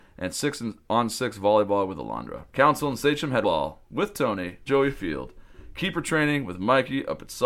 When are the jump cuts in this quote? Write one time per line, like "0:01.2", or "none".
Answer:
0:02.5
0:03.4
0:04.7